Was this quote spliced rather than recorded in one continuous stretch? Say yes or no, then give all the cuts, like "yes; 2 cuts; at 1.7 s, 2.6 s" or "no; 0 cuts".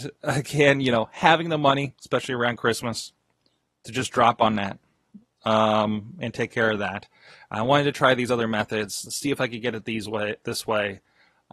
no; 0 cuts